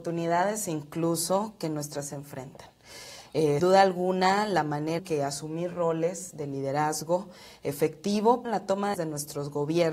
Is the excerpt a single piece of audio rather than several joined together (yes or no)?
no